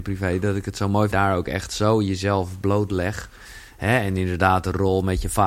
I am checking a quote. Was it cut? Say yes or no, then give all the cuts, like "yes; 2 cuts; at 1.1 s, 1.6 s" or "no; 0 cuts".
yes; 1 cut; at 1.1 s